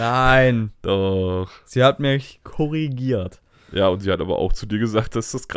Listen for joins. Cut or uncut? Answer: uncut